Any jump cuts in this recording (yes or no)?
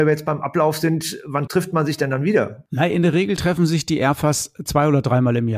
yes